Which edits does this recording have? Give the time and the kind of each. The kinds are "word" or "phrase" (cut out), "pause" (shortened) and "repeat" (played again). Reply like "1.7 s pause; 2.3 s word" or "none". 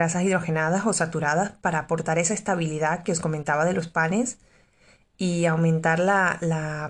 none